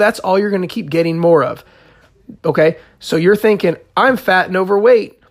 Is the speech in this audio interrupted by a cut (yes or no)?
yes